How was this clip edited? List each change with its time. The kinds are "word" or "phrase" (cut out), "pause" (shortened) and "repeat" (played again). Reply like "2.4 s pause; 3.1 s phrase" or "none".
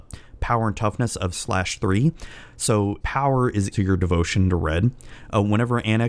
1.3 s word; 3.0 s word; 3.7 s word

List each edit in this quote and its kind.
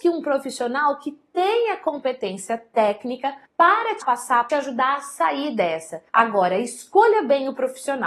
3.5 s pause; 4.0 s phrase; 4.5 s phrase; 6.1 s pause

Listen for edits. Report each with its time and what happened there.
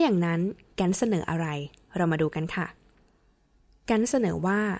none

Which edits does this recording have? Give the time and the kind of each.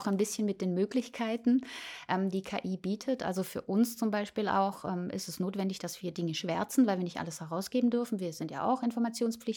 none

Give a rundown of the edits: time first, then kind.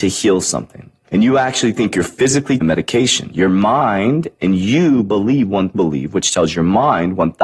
1.0 s pause; 2.6 s phrase; 5.7 s word

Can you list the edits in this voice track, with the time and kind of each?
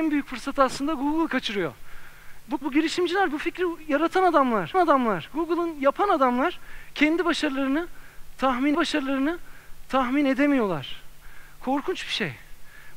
2.6 s word; 4.7 s repeat; 8.7 s repeat

